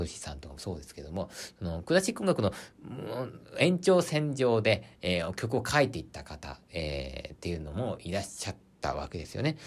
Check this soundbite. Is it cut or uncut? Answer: uncut